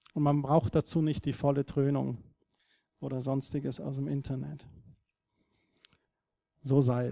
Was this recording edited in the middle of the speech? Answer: no; 0 cuts

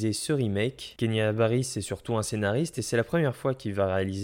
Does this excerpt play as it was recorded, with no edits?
yes; 0 cuts

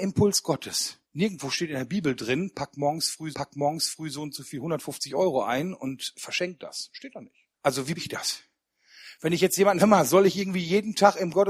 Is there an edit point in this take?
yes; 6 cuts; at 1.0 s, 3.3 s, 6.1 s, 7.5 s, 8.0 s, 9.8 s

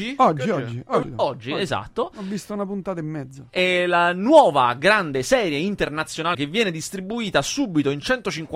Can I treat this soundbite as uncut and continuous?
no; 2 cuts; at 1.0 s, 6.3 s

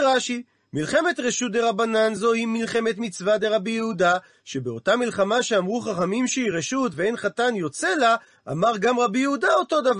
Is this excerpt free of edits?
yes; 0 cuts

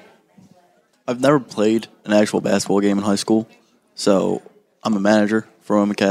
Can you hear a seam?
no; 0 cuts

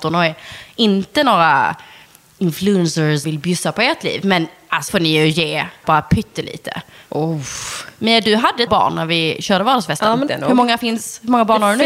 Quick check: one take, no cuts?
no; 5 cuts; at 3.2 s, 4.9 s, 5.8 s, 8.7 s, 10.3 s

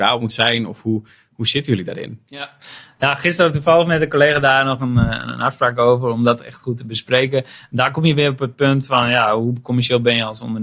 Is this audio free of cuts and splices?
yes; 0 cuts

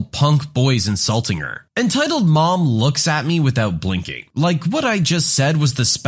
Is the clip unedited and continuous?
yes; 0 cuts

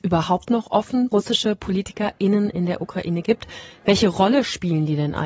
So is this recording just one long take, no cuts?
no; 1 cut; at 1.1 s

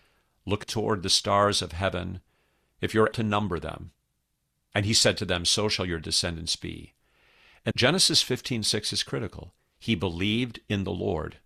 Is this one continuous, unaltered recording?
no; 2 cuts; at 3.1 s, 7.7 s

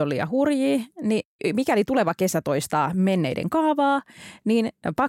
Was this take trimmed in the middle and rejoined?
no; 0 cuts

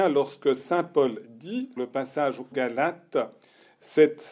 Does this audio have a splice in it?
yes; 2 cuts; at 1.8 s, 2.5 s

